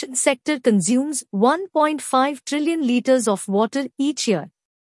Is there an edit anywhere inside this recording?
no; 0 cuts

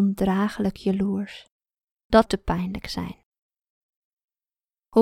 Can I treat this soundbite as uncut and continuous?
no; 1 cut; at 2.3 s

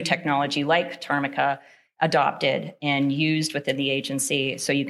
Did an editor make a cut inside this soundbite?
no; 0 cuts

